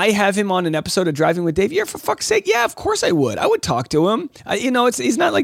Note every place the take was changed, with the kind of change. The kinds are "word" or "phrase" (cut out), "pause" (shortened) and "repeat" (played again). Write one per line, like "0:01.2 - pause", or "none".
0:04.4 - pause